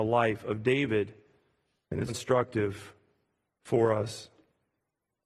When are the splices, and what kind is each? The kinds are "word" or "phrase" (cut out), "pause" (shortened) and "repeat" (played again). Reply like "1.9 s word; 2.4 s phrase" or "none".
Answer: 2.1 s word